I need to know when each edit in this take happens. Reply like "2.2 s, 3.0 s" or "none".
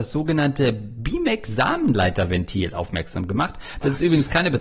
none